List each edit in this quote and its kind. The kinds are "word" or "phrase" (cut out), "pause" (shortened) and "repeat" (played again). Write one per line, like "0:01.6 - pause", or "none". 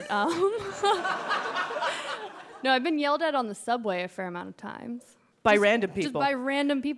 none